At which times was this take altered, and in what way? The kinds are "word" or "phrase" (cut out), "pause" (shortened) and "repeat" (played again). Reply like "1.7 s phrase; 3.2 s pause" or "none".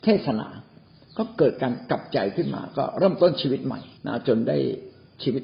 4.0 s pause

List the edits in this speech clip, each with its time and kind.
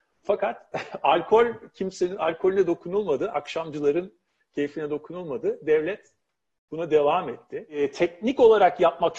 none

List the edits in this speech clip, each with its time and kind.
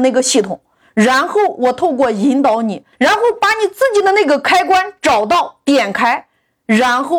2.9 s pause

